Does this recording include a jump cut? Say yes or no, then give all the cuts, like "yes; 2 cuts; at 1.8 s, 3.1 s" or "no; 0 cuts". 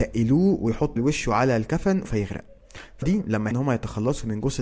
yes; 4 cuts; at 1.0 s, 2.0 s, 3.0 s, 3.5 s